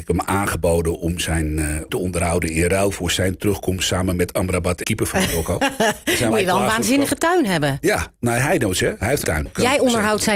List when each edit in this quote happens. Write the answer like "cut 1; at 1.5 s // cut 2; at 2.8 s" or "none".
cut 1; at 1.9 s // cut 2; at 4.8 s // cut 3; at 6.3 s // cut 4; at 9.2 s